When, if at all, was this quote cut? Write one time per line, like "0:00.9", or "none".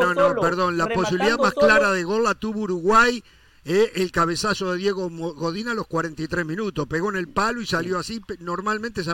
none